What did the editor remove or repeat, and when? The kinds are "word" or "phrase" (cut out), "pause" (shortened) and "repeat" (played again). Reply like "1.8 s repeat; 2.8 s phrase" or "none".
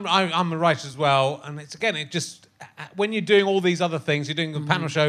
none